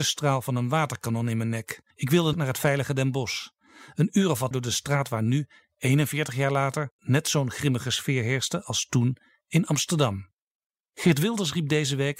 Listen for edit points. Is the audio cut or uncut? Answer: cut